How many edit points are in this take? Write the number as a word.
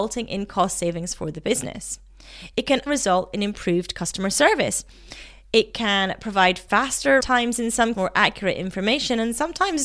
three